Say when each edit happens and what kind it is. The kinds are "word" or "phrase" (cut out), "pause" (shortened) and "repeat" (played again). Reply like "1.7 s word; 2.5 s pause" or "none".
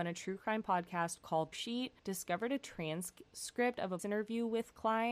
1.5 s phrase; 2.0 s pause; 4.0 s word